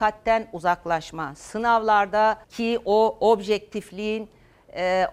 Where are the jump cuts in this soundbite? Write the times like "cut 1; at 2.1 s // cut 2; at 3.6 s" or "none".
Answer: cut 1; at 2.4 s